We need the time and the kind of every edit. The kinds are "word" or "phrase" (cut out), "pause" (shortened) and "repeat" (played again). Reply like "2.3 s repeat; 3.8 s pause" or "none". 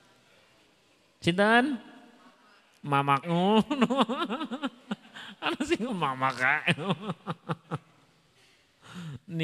3.2 s word; 5.9 s word